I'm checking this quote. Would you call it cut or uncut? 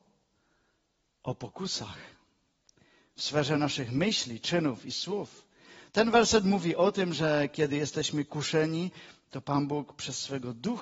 uncut